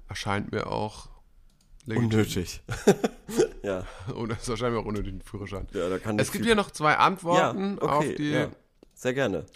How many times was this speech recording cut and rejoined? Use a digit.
0